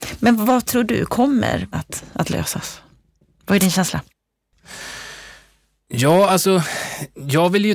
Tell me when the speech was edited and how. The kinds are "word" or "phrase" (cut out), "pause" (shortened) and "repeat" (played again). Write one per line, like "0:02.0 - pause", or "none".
0:01.7 - word